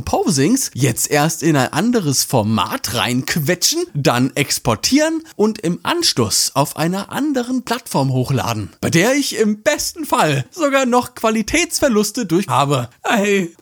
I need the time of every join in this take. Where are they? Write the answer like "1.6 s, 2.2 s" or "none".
8.8 s, 12.5 s